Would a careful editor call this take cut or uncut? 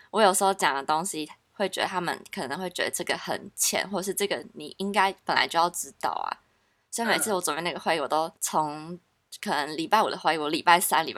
cut